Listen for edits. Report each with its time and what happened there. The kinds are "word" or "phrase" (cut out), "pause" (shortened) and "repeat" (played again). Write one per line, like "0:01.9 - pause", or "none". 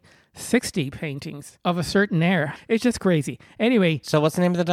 0:01.6 - pause
0:02.6 - word